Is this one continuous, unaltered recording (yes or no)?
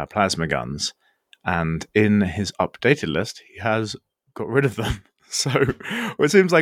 yes